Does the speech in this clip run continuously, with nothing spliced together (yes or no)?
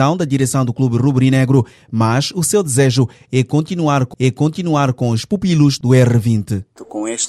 no